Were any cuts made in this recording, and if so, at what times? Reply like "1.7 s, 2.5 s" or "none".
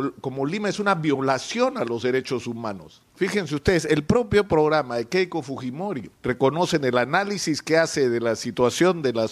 3.1 s, 6.1 s